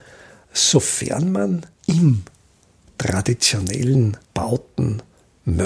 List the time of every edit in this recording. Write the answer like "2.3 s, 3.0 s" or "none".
1.7 s, 4.2 s